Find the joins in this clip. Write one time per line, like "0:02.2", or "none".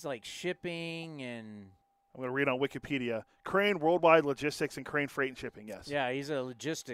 0:01.8